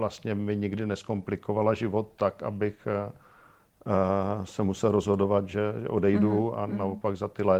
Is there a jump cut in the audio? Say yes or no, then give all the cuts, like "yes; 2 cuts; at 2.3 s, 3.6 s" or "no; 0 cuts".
no; 0 cuts